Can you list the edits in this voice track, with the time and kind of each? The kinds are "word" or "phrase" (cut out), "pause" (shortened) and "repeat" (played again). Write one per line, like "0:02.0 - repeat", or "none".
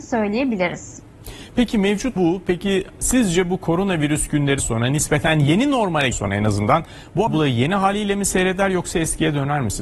0:02.2 - word
0:04.6 - word
0:06.1 - word
0:07.3 - word